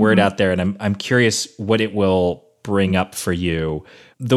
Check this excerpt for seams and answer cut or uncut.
uncut